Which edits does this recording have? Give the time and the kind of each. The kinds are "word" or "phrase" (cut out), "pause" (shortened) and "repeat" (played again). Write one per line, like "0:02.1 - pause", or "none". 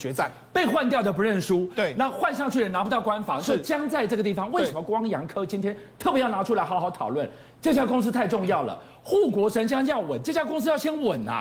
none